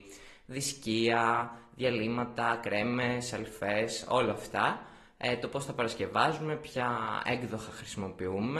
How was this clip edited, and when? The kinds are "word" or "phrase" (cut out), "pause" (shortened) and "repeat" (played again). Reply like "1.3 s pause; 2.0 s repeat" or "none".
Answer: none